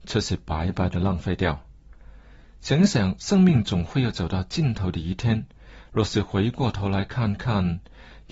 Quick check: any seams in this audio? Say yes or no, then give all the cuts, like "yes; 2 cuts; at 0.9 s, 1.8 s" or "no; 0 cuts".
no; 0 cuts